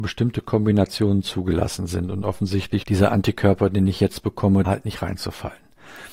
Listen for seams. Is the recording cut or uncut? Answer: cut